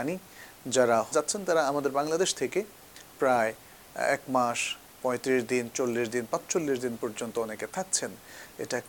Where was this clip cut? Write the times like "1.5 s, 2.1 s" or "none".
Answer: 1.1 s

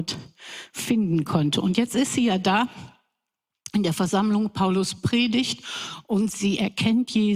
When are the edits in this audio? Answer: none

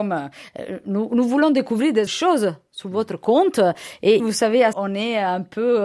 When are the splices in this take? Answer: 2.1 s, 4.2 s, 4.7 s

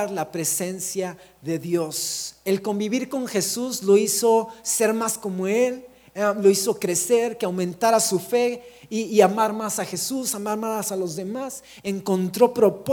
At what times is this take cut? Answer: none

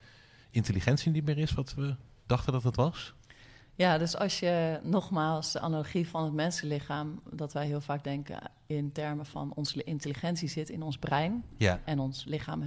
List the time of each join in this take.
none

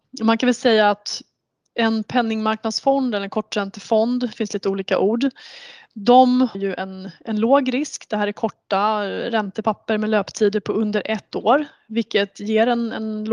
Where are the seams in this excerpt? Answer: 4.3 s, 6.5 s

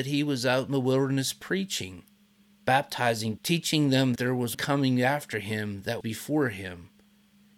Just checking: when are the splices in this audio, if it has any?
3.4 s, 4.2 s, 4.5 s, 6.0 s

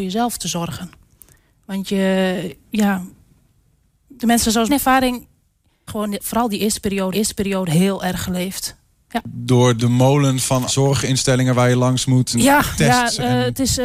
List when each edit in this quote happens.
4.2 s, 4.7 s, 5.9 s, 7.1 s, 9.8 s, 10.7 s, 12.3 s

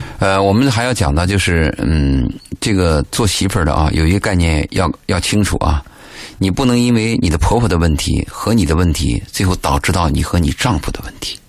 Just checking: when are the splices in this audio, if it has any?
none

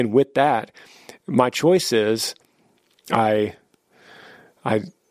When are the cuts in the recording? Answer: none

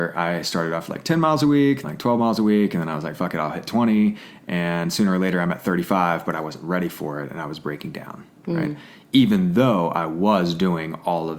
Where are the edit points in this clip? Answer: 1.8 s

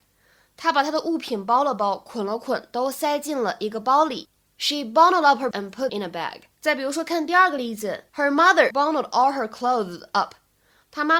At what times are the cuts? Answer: 5.5 s, 5.9 s, 6.5 s, 8.1 s, 8.7 s

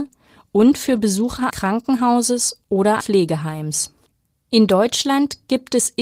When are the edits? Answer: 1.5 s, 3.0 s, 4.1 s

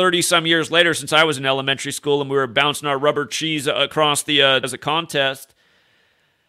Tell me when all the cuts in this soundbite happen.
4.6 s

